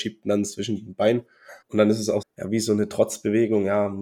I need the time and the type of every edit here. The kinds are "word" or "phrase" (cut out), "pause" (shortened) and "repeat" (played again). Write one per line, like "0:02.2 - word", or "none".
0:01.6 - pause
0:02.2 - word